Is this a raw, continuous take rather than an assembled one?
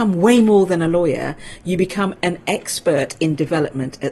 yes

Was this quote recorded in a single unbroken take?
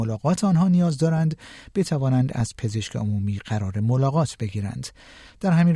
yes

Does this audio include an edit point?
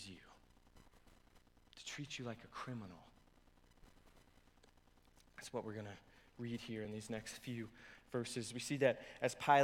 no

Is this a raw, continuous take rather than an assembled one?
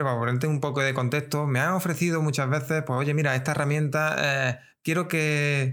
yes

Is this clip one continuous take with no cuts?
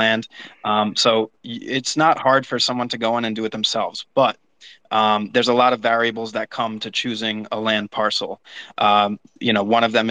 yes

